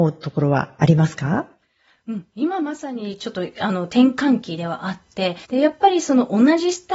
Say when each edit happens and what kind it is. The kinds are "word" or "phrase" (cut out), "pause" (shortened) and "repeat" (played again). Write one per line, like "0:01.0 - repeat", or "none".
0:05.4 - pause